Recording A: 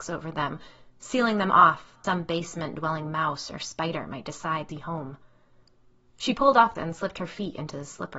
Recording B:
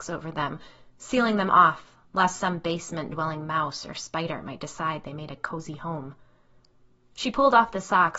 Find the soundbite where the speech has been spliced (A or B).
A